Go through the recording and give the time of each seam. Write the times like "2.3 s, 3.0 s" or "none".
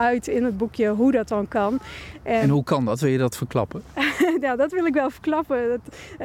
none